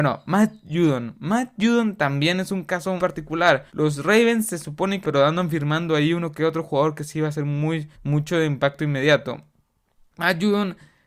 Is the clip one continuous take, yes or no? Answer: no